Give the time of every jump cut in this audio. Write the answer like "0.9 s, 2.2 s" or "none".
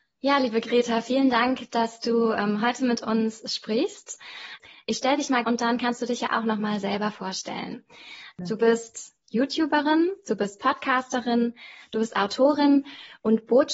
5.4 s